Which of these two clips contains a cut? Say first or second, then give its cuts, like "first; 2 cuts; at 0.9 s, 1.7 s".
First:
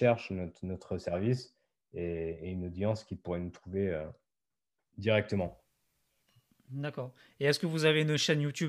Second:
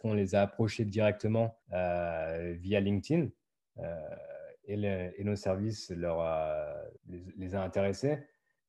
second; 2 cuts; at 1.6 s, 7.0 s